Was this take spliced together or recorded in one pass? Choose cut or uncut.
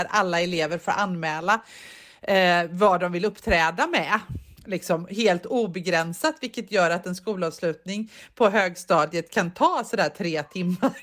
uncut